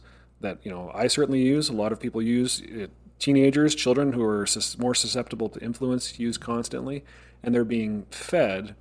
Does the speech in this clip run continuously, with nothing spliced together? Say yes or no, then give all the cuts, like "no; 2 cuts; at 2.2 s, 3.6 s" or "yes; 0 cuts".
yes; 0 cuts